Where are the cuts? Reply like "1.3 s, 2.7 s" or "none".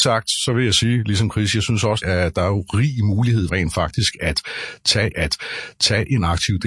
2.0 s, 3.5 s, 5.1 s